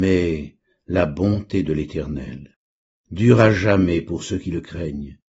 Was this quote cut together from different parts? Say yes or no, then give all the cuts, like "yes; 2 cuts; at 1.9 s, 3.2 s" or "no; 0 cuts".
no; 0 cuts